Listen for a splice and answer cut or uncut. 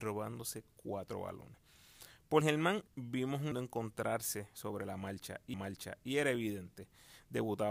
cut